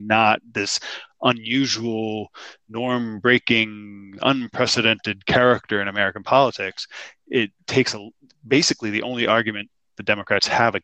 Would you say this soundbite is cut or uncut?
uncut